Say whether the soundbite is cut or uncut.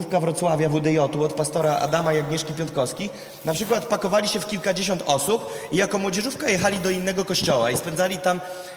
uncut